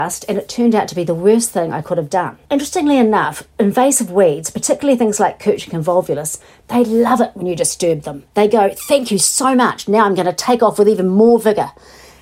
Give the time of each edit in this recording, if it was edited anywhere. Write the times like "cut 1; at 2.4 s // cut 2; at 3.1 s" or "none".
cut 1; at 2.5 s // cut 2; at 8.3 s